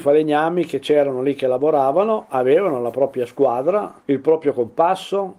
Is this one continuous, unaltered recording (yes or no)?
no